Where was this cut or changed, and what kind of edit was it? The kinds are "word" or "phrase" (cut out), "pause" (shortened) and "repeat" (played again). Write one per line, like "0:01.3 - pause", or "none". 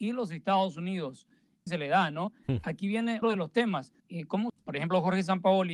0:01.7 - phrase
0:03.2 - word
0:04.0 - pause
0:04.5 - phrase